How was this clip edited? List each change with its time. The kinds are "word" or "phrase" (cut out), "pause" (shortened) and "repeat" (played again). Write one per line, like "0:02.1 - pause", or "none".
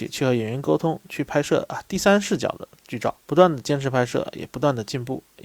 0:03.2 - pause